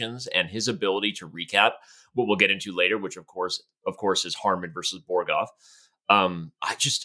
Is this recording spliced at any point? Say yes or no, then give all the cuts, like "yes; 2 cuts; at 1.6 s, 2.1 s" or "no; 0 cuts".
no; 0 cuts